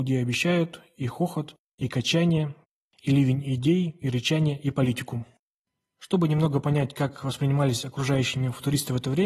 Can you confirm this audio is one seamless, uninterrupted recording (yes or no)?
yes